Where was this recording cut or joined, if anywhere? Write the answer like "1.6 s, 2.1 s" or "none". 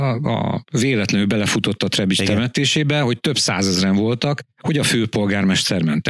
4.5 s